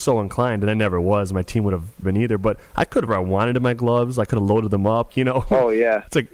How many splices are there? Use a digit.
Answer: 4